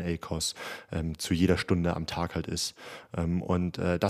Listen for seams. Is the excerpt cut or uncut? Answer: uncut